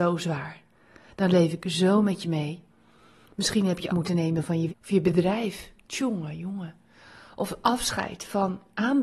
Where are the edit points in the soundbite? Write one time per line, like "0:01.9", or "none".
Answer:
0:03.9
0:04.7